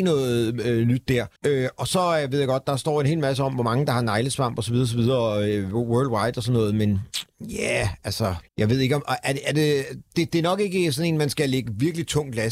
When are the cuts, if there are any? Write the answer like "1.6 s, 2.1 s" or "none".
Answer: 1.4 s, 8.5 s